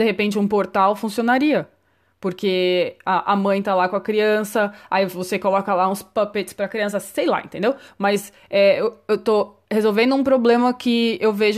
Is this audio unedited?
yes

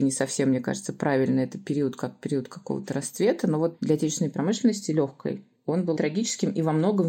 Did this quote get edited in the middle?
yes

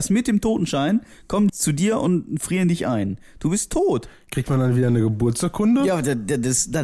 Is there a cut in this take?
yes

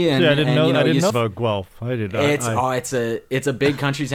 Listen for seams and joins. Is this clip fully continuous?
no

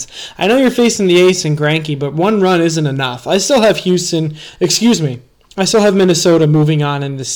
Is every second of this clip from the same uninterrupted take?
yes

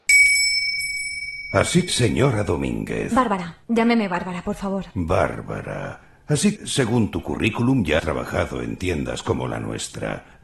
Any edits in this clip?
yes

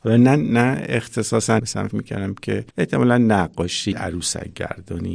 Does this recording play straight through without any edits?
no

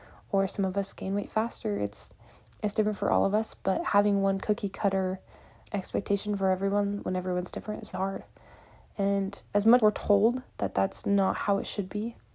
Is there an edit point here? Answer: yes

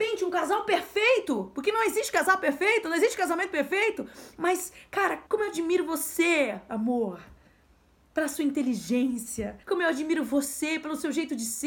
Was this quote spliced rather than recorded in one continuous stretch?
yes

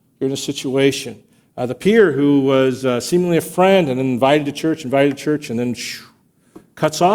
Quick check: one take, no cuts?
yes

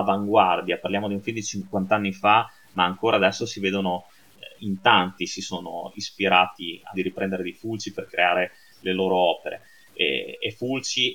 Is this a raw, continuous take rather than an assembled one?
no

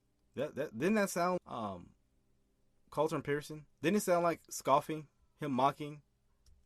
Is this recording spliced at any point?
yes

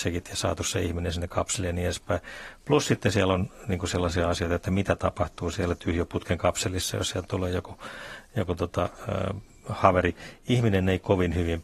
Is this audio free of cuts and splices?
yes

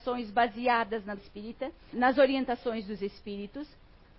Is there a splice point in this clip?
yes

